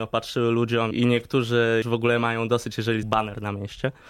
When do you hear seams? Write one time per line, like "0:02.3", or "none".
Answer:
0:00.9
0:01.8
0:03.0